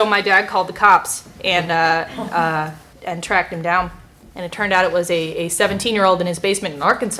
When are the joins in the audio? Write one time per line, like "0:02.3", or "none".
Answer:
0:02.9